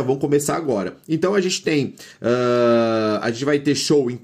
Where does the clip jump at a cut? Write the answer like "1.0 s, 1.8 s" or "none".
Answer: none